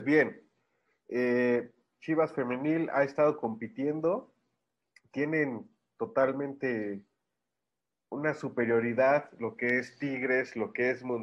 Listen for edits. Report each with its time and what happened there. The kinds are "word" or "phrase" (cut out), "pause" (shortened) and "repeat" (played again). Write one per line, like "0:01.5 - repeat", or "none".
none